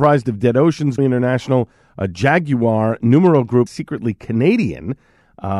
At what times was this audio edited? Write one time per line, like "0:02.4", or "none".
0:01.0
0:03.7